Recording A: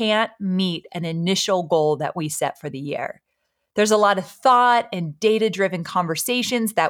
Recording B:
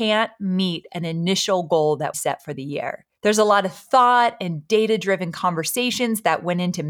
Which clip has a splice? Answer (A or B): B